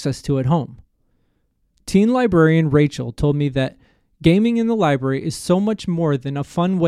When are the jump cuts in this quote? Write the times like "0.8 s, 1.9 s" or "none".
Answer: none